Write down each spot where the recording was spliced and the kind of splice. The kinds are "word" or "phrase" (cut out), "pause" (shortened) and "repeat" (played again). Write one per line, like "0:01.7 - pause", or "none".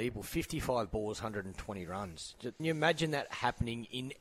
0:02.6 - word